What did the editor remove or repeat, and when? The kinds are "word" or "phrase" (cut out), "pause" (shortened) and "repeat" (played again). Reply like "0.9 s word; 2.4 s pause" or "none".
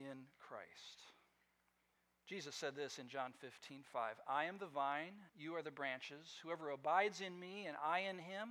1.9 s pause; 5.3 s pause